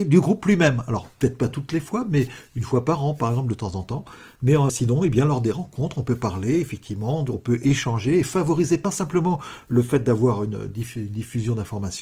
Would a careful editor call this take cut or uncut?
uncut